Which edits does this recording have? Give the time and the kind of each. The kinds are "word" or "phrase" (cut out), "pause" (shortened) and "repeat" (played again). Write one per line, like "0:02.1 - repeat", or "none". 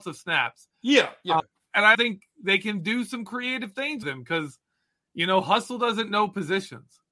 0:01.4 - word
0:01.9 - word
0:04.0 - word